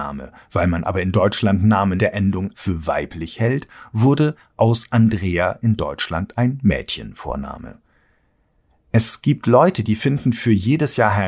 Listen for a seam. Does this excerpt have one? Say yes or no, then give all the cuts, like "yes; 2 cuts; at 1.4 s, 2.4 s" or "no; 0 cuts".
yes; 2 cuts; at 2.0 s, 2.5 s